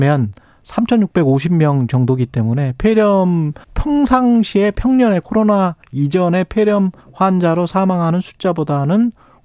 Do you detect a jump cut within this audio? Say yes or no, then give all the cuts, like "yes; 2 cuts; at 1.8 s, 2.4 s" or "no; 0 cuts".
yes; 2 cuts; at 3.6 s, 7.0 s